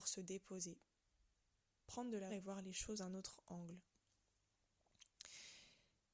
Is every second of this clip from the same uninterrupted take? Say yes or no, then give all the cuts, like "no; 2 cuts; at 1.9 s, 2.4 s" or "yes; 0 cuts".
no; 3 cuts; at 1.8 s, 2.3 s, 3.0 s